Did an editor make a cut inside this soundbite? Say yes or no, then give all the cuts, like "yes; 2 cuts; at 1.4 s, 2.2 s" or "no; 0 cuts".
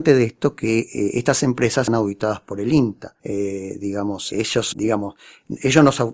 yes; 4 cuts; at 1.9 s, 3.2 s, 4.3 s, 4.7 s